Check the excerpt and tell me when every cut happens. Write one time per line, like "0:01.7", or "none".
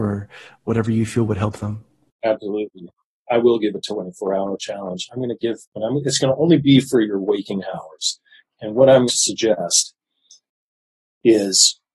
0:09.1